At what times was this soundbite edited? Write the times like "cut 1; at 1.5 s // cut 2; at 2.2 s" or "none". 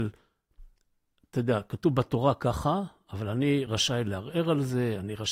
none